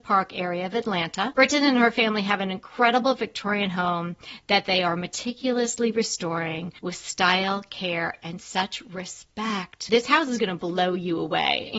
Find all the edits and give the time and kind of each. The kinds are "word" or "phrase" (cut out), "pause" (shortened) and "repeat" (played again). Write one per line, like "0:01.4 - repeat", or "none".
0:06.8 - pause